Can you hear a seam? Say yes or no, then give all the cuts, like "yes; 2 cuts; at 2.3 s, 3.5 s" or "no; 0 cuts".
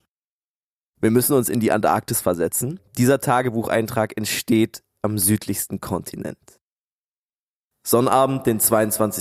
no; 0 cuts